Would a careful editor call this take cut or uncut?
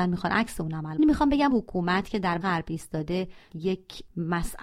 cut